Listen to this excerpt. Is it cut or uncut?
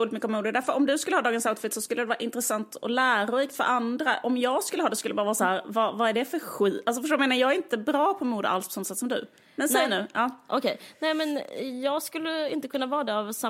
uncut